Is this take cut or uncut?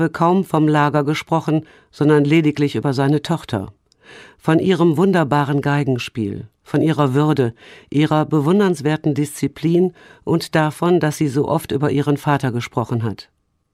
uncut